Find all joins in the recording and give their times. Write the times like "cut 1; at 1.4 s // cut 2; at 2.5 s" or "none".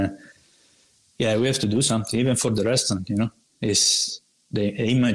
none